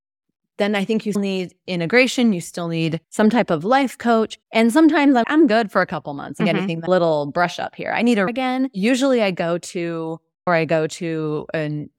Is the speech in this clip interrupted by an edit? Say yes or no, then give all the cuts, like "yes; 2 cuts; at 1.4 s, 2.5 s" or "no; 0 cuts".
yes; 7 cuts; at 1.1 s, 3.0 s, 4.4 s, 5.2 s, 6.9 s, 8.3 s, 10.5 s